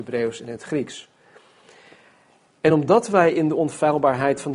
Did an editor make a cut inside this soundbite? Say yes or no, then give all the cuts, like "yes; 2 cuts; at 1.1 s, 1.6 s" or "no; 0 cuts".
no; 0 cuts